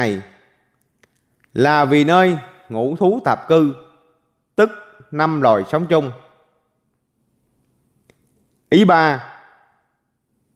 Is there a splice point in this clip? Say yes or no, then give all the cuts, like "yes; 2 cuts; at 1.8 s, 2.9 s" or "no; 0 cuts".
no; 0 cuts